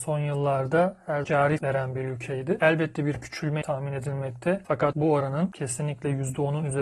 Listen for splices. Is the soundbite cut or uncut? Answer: cut